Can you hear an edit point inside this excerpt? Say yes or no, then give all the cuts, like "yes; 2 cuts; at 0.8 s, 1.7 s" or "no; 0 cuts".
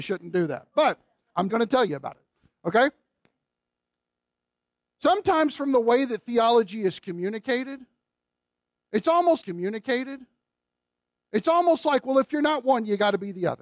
yes; 2 cuts; at 1.5 s, 9.4 s